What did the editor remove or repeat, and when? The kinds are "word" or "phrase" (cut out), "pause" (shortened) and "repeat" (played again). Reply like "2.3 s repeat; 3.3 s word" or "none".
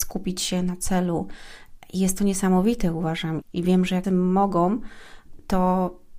3.4 s word; 4.0 s word

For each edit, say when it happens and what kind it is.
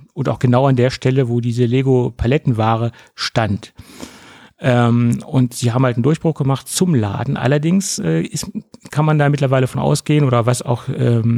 none

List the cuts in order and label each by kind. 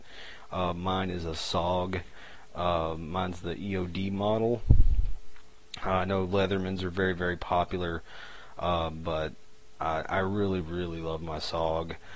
10.6 s word

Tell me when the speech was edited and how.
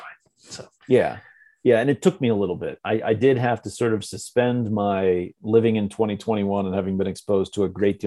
none

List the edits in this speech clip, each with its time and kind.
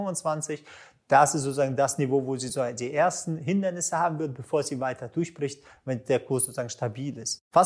none

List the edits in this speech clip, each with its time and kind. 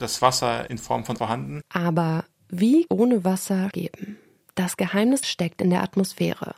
1.2 s word; 2.9 s phrase; 3.7 s phrase; 5.2 s word

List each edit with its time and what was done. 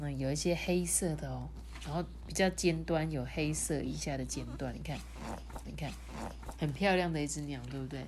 5.7 s repeat

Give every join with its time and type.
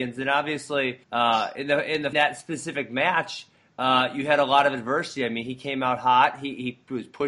1.0 s pause; 2.1 s phrase

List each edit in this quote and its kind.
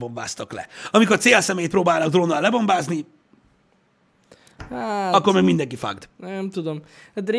6.1 s pause

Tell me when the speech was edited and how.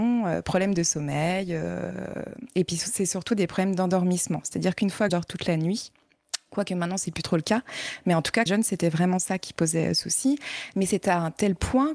5.1 s phrase; 8.5 s phrase

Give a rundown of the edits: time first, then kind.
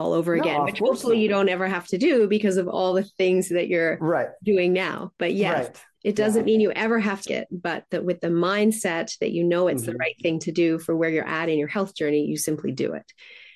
5.2 s pause; 5.9 s pause; 7.3 s word

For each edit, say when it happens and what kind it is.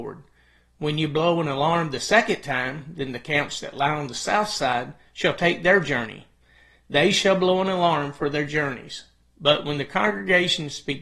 none

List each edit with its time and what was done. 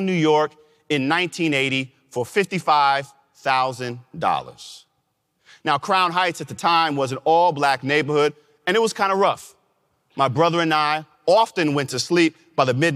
none

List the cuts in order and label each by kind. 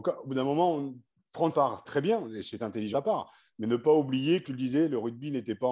1.5 s word; 1.8 s word; 2.6 s word; 2.9 s word; 4.4 s word

